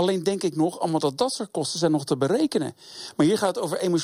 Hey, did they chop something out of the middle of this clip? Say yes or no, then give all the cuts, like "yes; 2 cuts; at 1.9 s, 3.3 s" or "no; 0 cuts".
no; 0 cuts